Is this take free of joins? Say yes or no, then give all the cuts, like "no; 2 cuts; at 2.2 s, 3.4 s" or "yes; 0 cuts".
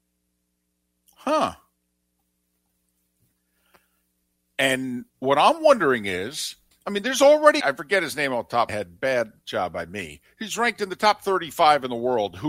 no; 4 cuts; at 5.1 s, 6.7 s, 7.6 s, 8.7 s